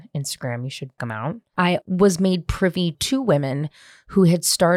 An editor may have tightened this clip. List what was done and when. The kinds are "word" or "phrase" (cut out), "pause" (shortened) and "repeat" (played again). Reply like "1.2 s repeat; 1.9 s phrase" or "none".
1.0 s word; 1.8 s word; 2.9 s word